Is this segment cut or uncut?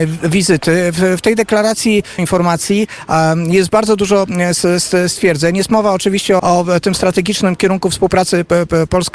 cut